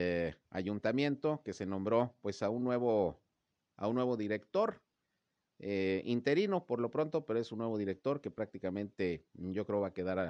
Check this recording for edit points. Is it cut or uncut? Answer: uncut